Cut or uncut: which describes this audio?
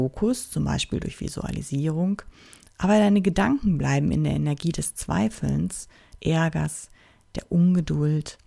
cut